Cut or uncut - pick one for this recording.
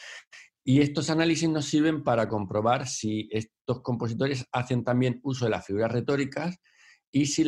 uncut